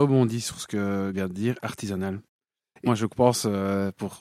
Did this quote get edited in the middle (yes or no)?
yes